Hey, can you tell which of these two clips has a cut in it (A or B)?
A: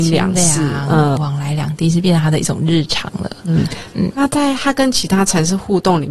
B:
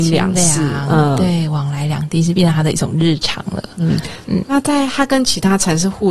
A